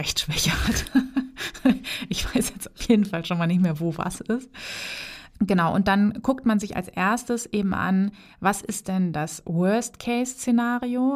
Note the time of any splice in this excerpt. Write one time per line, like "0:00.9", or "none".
none